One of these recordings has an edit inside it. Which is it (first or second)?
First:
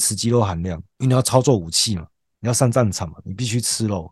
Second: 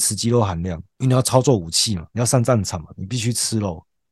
second